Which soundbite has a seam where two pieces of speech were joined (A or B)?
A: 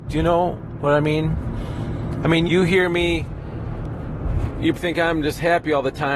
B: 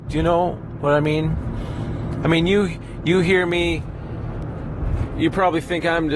A